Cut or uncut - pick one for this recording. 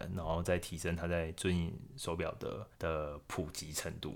cut